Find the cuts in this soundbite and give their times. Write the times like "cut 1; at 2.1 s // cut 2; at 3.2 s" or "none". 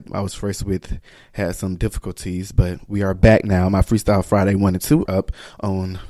cut 1; at 5.1 s